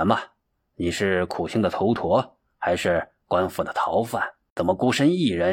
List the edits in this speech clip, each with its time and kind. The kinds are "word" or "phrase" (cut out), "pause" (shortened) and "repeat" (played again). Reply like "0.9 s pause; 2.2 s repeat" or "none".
4.5 s pause